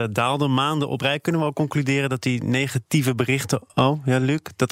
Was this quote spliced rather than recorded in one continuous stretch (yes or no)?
yes